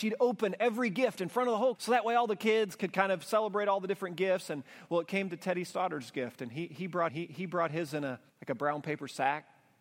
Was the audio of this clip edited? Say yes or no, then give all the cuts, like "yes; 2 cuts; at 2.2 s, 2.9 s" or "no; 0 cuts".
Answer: yes; 3 cuts; at 1.8 s, 7.1 s, 8.3 s